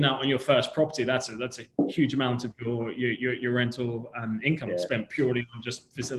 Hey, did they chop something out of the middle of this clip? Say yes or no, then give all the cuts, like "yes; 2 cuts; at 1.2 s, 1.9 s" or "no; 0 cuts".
no; 0 cuts